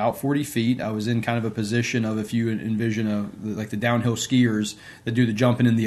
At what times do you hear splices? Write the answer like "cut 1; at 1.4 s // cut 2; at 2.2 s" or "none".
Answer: none